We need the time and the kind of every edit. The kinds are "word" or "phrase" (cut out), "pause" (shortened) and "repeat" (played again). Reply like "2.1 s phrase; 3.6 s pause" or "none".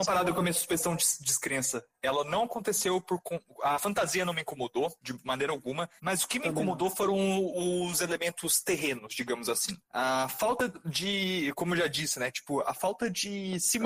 5.0 s pause; 6.0 s pause; 9.8 s pause